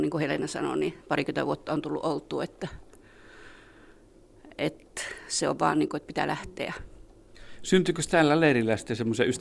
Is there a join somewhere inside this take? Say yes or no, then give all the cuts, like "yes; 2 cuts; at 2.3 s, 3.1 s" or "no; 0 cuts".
yes; 1 cut; at 1.0 s